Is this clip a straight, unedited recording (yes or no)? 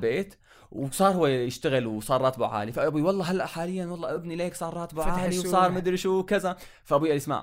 yes